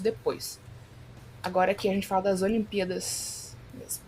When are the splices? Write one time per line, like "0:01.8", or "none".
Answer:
none